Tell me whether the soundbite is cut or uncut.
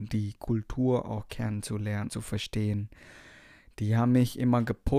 cut